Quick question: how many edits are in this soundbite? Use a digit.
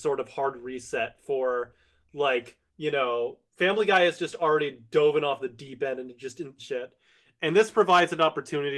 3